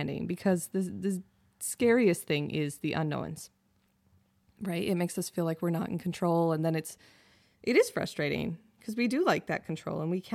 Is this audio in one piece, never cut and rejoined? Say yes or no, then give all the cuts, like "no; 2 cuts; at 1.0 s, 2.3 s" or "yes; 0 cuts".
yes; 0 cuts